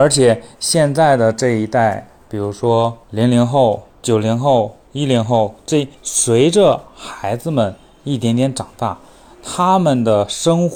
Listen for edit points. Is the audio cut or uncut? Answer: cut